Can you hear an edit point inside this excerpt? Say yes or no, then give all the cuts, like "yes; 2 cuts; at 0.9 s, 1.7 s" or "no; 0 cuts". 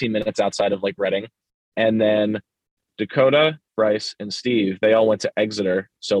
no; 0 cuts